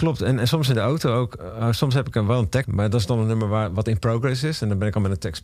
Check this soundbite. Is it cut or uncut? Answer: cut